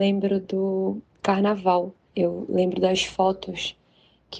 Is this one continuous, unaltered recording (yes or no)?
no